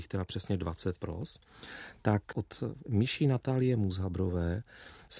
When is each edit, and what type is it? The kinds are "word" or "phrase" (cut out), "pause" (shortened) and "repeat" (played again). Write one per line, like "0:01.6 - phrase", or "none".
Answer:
0:01.0 - word
0:02.8 - word